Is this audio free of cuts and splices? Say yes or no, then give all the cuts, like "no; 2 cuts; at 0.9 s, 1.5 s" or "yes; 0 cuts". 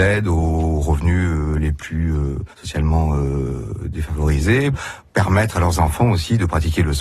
no; 2 cuts; at 2.5 s, 4.7 s